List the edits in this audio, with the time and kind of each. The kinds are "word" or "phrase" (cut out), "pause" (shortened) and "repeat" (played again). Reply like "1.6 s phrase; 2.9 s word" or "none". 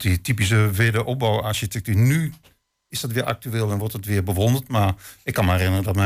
none